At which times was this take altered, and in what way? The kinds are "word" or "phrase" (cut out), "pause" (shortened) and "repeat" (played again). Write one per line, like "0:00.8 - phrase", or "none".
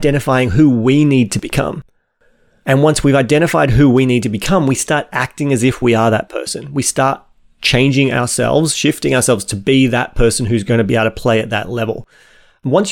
none